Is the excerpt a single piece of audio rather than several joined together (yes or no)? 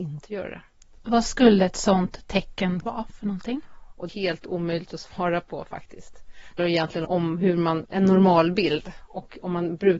no